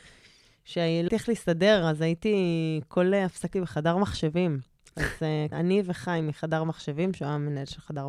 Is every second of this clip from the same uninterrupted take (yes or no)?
no